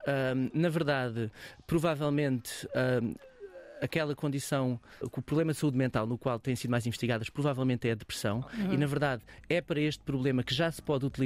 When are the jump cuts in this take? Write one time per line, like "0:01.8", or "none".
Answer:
0:05.0